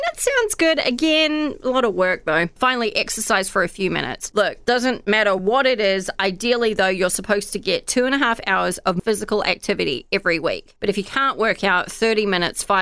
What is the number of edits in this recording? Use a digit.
0